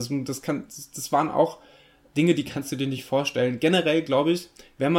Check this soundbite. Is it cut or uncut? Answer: uncut